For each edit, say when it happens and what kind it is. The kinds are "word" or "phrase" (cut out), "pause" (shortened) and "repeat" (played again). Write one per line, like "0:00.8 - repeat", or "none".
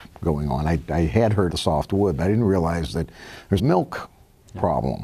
0:01.5 - word
0:03.6 - word